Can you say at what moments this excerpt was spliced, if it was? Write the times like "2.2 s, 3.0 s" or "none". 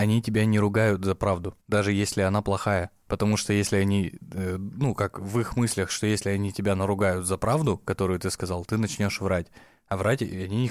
1.6 s